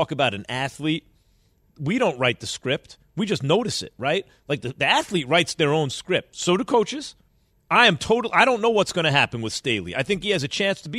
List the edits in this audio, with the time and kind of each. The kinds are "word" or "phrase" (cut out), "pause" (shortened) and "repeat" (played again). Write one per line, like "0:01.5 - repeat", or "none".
none